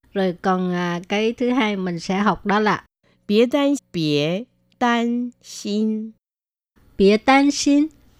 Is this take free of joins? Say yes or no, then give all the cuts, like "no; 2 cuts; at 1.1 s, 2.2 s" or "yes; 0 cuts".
no; 1 cut; at 3.8 s